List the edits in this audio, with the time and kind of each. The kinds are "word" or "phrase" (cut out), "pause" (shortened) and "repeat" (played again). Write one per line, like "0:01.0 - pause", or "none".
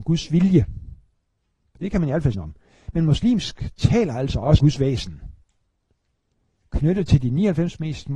0:02.3 - word
0:03.7 - word
0:04.6 - word